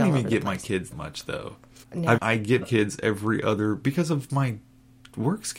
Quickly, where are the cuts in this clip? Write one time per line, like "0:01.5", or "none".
0:00.9
0:01.8
0:02.2
0:02.6